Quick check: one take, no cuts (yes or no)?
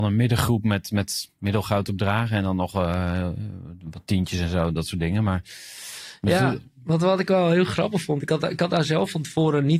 yes